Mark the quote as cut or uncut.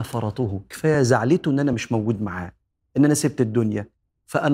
uncut